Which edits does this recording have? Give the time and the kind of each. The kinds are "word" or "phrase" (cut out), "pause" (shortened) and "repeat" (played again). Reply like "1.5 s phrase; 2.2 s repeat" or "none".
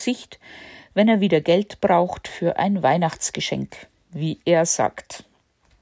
none